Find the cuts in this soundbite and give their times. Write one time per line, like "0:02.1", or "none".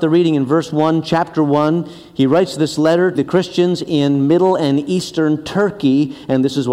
0:03.1